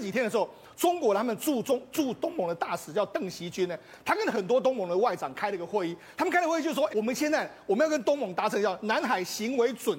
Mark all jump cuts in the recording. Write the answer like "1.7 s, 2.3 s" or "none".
6.9 s